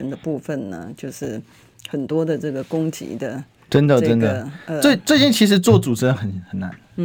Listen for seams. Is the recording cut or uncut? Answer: uncut